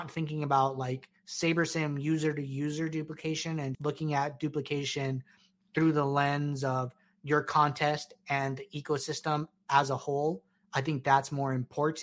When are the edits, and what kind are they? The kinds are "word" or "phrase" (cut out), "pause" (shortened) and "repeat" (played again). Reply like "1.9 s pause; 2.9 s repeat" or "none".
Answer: 3.7 s word